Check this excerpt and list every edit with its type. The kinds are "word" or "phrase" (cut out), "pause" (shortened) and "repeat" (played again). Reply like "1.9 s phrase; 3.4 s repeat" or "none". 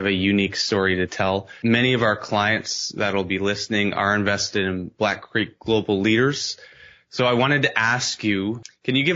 none